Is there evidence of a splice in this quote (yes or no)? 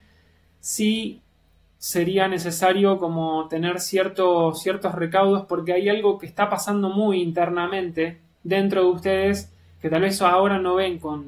no